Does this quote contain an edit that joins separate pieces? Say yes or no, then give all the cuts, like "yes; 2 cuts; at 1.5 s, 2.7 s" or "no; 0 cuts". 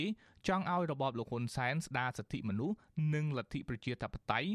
no; 0 cuts